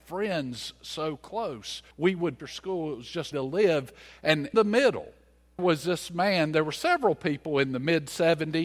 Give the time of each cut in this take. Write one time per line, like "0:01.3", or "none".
0:01.9
0:02.4
0:03.3
0:04.5
0:05.6

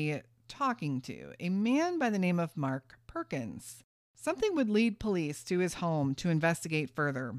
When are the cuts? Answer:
0:04.0

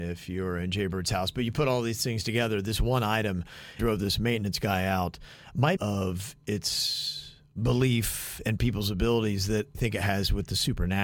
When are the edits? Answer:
0:03.8
0:05.8
0:09.7

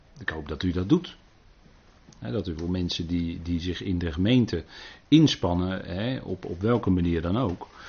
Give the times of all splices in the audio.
none

